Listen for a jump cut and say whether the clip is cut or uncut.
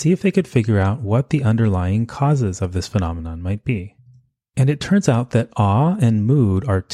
uncut